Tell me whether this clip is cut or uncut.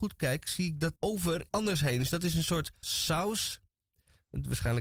cut